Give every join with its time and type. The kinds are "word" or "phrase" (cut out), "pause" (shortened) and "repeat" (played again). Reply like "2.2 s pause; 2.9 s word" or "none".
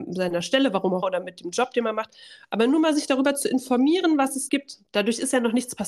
1.0 s word; 4.5 s word